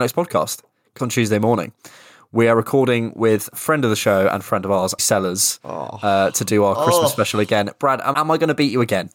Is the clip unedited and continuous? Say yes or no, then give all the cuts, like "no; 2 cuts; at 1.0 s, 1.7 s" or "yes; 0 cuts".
no; 4 cuts; at 1.0 s, 3.5 s, 5.0 s, 8.1 s